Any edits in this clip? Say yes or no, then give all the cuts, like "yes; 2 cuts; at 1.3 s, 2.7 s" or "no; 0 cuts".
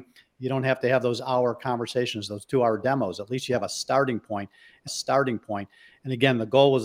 yes; 1 cut; at 4.9 s